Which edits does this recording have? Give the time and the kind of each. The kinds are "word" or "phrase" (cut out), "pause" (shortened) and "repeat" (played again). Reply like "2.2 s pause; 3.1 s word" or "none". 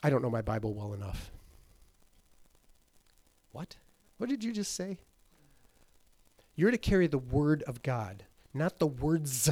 4.1 s pause